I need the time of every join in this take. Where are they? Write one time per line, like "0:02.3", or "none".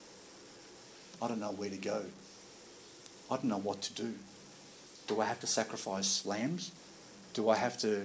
none